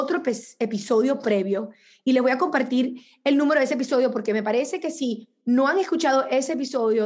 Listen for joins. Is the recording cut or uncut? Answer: uncut